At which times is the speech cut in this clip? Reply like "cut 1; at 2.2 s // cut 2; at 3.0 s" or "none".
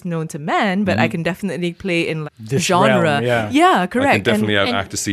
cut 1; at 2.2 s